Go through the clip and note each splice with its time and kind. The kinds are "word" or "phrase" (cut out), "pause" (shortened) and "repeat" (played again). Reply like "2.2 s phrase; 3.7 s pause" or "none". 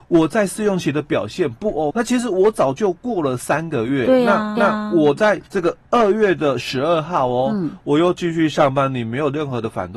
1.9 s phrase; 4.6 s repeat; 5.5 s pause; 5.8 s pause

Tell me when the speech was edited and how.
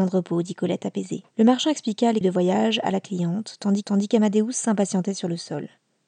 1.3 s pause; 2.2 s word; 3.8 s repeat

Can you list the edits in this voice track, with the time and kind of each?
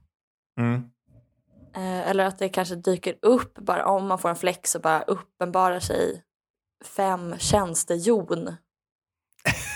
none

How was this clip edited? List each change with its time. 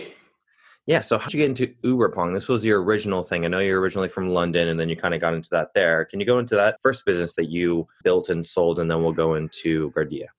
1.3 s word; 6.8 s word; 8.0 s word

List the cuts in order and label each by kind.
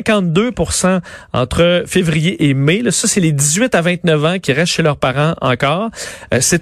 none

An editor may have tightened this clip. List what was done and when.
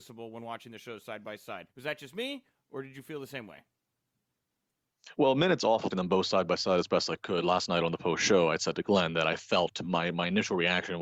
1.7 s pause; 5.9 s word

